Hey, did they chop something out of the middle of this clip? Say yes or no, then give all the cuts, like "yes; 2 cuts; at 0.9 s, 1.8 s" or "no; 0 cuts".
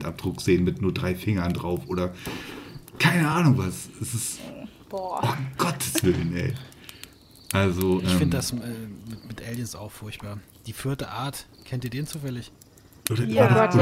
no; 0 cuts